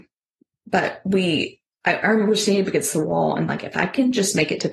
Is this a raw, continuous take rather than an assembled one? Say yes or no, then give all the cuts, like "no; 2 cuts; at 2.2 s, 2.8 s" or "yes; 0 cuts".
no; 1 cut; at 3.5 s